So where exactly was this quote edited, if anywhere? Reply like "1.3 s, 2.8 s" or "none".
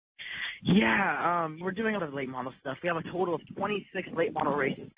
1.6 s, 2.0 s